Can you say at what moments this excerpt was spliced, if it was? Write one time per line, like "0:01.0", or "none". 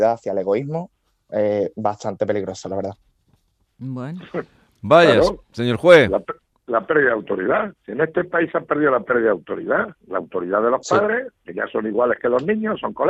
0:07.8
0:10.0